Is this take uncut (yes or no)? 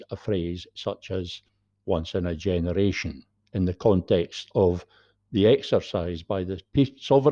yes